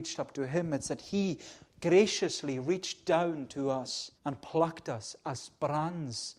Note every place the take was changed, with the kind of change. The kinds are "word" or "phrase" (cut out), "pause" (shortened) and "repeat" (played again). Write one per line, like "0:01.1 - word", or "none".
0:04.2 - pause